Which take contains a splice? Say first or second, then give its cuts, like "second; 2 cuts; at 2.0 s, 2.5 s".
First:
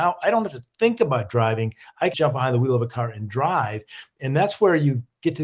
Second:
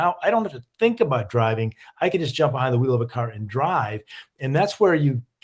first; 1 cut; at 2.1 s